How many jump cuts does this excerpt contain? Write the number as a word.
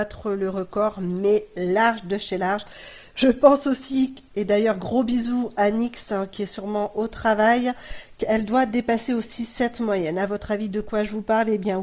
zero